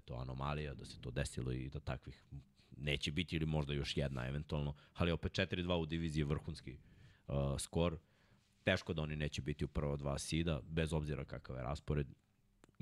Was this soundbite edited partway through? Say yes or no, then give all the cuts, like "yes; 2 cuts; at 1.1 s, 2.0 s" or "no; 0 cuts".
no; 0 cuts